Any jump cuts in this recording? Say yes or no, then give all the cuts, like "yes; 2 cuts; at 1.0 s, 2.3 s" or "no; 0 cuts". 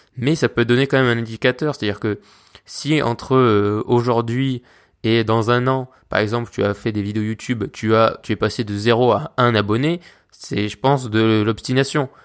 no; 0 cuts